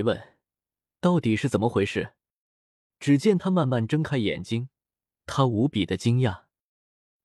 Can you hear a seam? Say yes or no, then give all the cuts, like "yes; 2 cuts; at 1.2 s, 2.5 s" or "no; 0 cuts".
no; 0 cuts